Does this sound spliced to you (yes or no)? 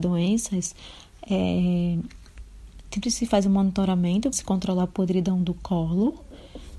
yes